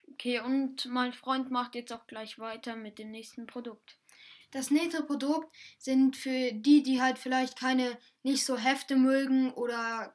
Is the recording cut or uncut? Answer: uncut